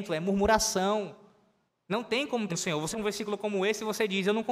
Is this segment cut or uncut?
cut